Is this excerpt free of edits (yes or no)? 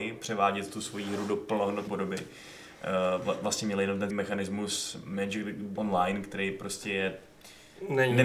no